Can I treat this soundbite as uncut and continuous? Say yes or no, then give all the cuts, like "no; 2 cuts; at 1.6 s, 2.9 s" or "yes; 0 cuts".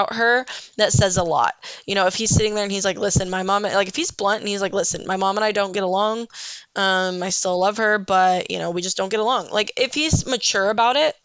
yes; 0 cuts